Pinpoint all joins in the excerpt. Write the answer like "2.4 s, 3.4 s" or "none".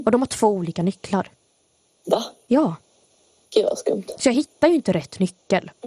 none